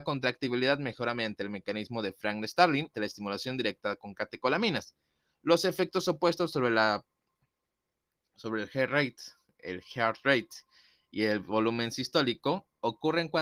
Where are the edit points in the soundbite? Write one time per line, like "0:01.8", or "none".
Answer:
0:02.9